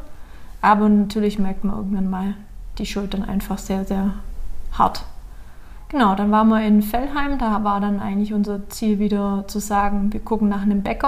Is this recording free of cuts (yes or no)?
yes